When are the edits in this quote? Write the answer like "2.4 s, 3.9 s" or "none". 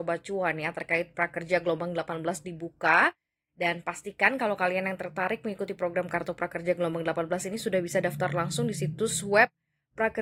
none